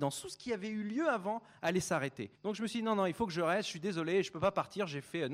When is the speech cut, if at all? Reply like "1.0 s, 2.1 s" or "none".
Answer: 2.4 s